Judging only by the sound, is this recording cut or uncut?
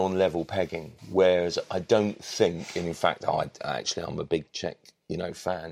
cut